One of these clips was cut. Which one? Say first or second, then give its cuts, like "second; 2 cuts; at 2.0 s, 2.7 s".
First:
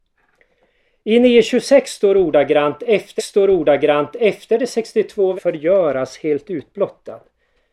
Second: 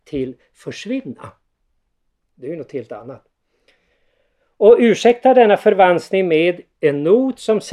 first; 2 cuts; at 3.2 s, 5.4 s